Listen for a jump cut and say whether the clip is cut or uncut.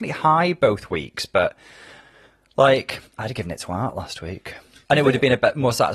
uncut